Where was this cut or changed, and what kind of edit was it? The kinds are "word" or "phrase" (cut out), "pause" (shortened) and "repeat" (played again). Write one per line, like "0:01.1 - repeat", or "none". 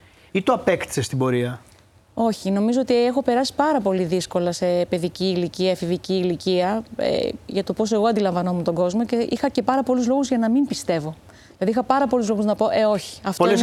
none